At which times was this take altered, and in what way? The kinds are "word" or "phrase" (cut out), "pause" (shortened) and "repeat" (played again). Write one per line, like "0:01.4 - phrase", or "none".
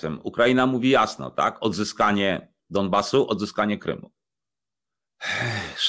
0:02.6 - pause